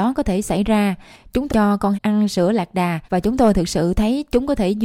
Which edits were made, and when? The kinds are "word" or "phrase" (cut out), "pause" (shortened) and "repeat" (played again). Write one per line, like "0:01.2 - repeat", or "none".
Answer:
0:01.5 - word
0:01.9 - word
0:03.1 - pause